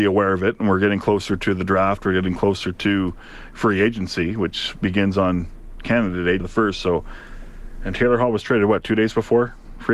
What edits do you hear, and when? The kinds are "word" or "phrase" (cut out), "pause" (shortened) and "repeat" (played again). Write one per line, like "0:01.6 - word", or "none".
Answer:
0:06.4 - word